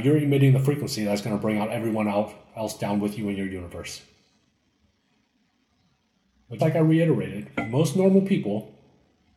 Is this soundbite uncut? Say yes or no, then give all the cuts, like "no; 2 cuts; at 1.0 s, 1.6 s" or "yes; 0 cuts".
no; 1 cut; at 6.6 s